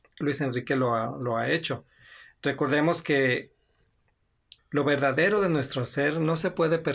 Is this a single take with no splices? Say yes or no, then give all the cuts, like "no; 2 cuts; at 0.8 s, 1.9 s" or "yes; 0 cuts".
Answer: no; 1 cut; at 4.6 s